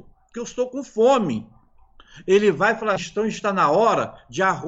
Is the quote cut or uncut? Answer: cut